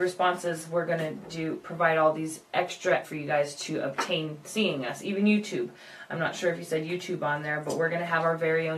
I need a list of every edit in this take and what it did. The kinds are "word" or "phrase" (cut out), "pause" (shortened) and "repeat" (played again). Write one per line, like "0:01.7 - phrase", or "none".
0:03.0 - word